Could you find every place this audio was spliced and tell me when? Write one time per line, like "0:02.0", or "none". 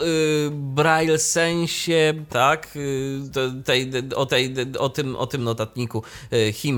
0:02.3
0:04.3
0:05.4